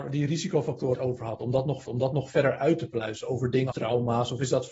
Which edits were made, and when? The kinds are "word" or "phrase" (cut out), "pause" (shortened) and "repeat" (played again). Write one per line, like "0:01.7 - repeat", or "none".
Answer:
0:00.9 - phrase
0:01.9 - repeat
0:03.7 - word